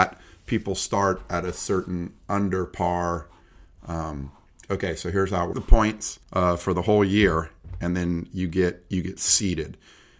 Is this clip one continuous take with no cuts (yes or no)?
no